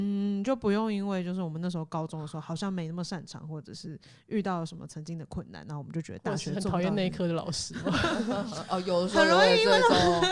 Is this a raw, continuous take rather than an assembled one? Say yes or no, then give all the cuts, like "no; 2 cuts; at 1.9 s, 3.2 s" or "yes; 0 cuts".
yes; 0 cuts